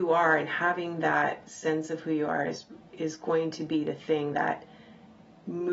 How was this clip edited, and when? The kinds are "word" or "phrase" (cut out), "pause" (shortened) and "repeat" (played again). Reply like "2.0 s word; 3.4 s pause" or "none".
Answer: none